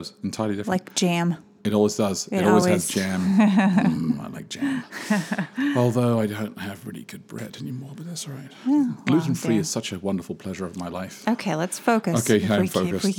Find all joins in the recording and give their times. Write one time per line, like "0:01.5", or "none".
none